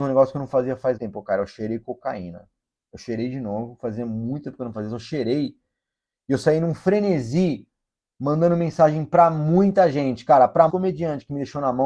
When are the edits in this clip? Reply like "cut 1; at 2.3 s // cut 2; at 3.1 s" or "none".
cut 1; at 1.0 s // cut 2; at 10.7 s